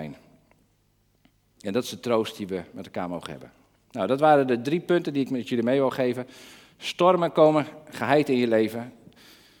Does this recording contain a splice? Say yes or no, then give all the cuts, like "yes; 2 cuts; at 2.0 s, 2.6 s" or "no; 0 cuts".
no; 0 cuts